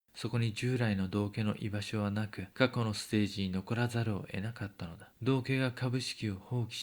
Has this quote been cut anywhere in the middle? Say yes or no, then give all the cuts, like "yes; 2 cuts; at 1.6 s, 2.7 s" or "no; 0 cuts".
yes; 2 cuts; at 2.5 s, 5.1 s